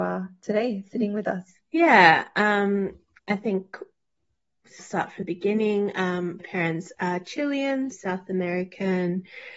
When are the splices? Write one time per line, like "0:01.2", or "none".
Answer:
0:01.6
0:03.1
0:04.8
0:05.2
0:06.4
0:07.9